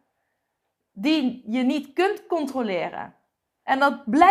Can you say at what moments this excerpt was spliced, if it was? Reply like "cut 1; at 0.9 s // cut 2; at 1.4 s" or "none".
none